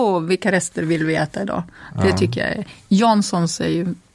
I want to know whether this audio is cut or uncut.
uncut